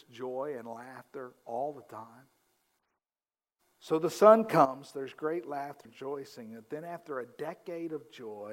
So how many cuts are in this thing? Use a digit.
1